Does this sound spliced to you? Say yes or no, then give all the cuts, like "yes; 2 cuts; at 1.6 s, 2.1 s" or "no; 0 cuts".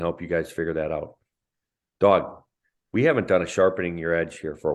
no; 0 cuts